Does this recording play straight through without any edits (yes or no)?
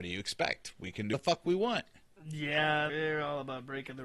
no